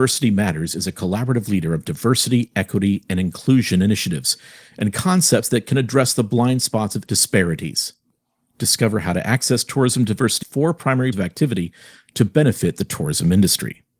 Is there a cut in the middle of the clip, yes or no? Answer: yes